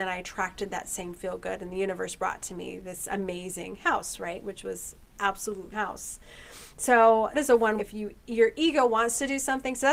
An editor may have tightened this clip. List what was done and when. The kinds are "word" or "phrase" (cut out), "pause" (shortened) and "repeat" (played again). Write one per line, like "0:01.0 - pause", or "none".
0:05.7 - phrase
0:07.3 - word
0:07.8 - word

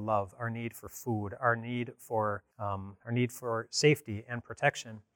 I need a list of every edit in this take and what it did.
0:02.5 - pause

